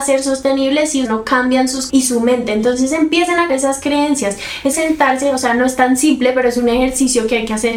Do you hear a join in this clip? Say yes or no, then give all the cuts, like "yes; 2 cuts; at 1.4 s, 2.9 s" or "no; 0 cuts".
yes; 4 cuts; at 1.0 s, 1.9 s, 3.5 s, 4.7 s